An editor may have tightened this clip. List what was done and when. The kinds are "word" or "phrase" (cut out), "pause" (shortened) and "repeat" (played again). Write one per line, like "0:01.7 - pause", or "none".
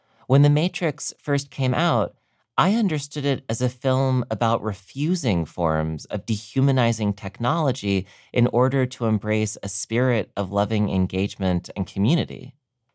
none